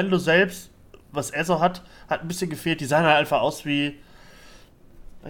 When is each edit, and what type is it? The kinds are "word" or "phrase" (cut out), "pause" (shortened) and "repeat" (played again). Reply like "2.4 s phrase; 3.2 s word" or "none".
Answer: none